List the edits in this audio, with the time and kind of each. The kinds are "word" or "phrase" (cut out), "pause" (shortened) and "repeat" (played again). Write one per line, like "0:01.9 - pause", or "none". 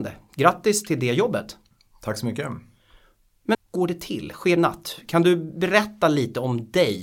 0:03.5 - word
0:04.6 - phrase